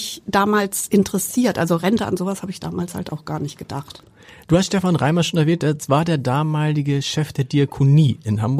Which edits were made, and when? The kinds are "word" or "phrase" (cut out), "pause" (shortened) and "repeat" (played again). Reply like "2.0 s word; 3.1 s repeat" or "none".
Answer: none